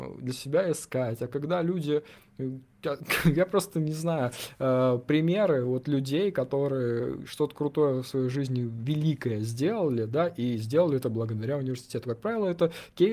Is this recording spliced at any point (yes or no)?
no